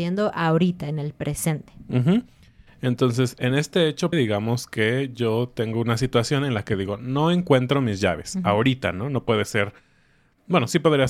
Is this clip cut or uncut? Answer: cut